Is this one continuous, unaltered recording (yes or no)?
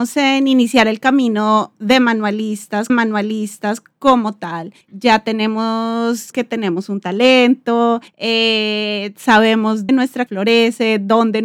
no